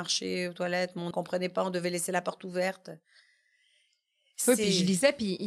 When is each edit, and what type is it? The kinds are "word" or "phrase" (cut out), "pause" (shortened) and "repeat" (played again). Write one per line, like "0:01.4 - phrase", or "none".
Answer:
0:01.1 - word